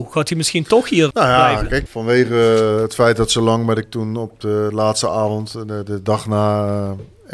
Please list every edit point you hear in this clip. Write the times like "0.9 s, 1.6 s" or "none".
1.9 s, 3.8 s